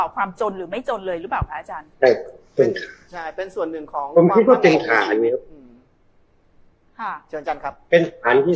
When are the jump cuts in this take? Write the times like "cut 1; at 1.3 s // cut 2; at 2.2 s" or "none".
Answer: cut 1; at 1.9 s